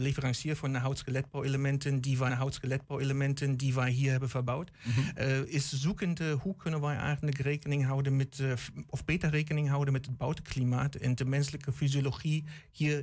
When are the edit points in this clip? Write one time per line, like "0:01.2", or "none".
0:02.3